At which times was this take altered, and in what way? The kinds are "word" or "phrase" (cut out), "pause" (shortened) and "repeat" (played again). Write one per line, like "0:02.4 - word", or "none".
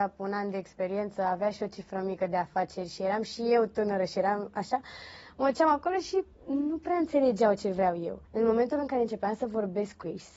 0:08.3 - pause

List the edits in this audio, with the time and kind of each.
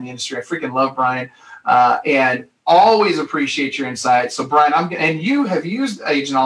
none

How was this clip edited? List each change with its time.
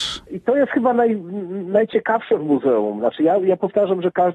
none

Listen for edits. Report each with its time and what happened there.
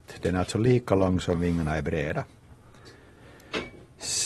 none

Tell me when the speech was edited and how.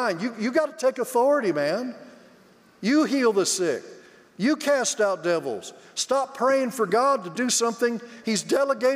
none

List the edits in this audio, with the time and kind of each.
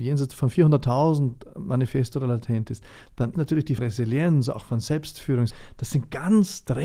0:03.3 - word
0:03.8 - phrase
0:05.5 - word

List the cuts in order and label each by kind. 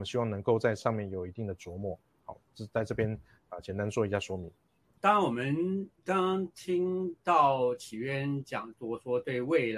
none

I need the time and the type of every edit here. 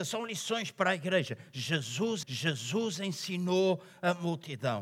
0:02.2 - repeat

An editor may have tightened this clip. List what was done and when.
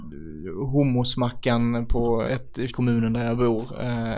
0:02.3 - word
0:02.7 - word

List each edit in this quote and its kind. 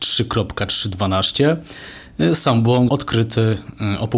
0:02.9 - word

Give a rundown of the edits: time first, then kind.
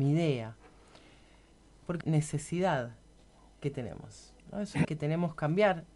0:02.0 - phrase
0:04.4 - pause
0:04.8 - word

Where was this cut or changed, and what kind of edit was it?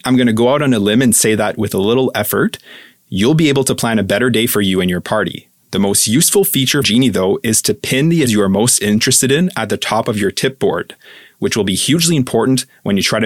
0:06.8 - word
0:08.3 - word

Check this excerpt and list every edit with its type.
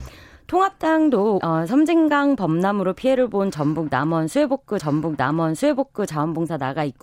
0:01.4 - word
0:04.8 - repeat

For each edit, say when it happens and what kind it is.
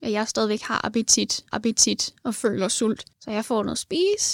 0:01.5 - repeat
0:03.1 - pause

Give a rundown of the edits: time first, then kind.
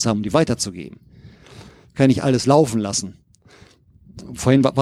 none

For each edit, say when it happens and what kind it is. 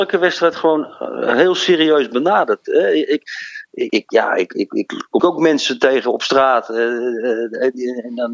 0:03.9 - word
0:05.2 - word

